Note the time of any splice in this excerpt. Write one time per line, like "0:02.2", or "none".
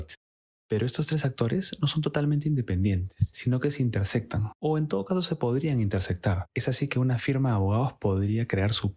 none